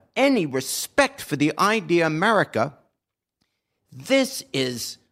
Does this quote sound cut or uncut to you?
uncut